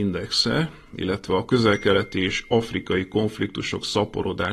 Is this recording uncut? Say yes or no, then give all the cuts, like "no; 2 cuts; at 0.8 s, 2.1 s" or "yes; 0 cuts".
yes; 0 cuts